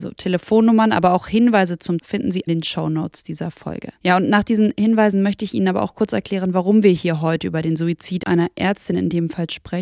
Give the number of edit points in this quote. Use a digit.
3